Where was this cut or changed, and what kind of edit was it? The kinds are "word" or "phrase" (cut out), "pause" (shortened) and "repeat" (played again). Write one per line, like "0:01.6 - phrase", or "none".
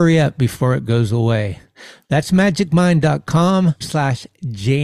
0:03.8 - word